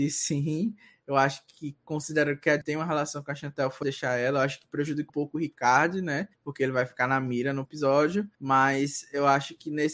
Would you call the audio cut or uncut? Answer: cut